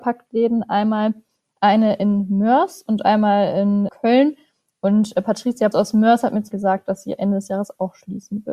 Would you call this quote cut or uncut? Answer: cut